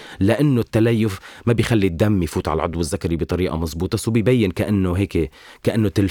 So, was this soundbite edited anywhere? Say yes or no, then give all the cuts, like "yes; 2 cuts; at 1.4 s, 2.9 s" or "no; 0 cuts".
no; 0 cuts